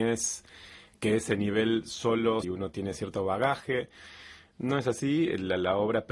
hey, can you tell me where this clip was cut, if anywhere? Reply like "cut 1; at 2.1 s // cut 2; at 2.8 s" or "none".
cut 1; at 2.4 s